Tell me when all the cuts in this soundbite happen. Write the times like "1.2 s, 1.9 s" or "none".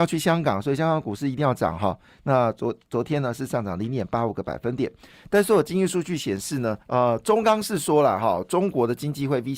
6.8 s